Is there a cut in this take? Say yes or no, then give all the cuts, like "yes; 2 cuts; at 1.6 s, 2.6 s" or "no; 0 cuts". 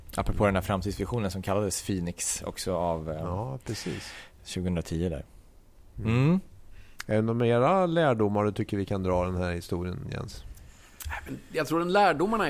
no; 0 cuts